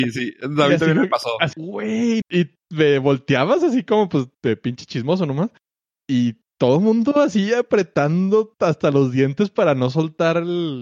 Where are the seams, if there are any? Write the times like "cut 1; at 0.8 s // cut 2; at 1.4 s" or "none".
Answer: cut 1; at 1.5 s // cut 2; at 2.2 s // cut 3; at 4.3 s

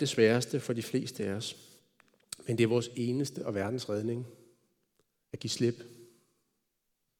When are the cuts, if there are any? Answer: none

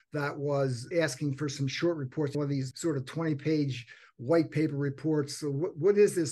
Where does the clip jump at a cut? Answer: cut 1; at 0.9 s // cut 2; at 2.3 s // cut 3; at 2.7 s

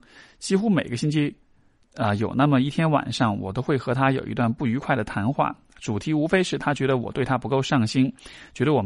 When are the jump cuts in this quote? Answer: none

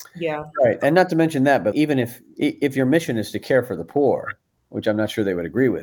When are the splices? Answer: cut 1; at 1.7 s // cut 2; at 4.6 s

